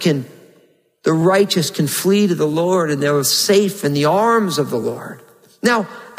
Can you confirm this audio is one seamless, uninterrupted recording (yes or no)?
yes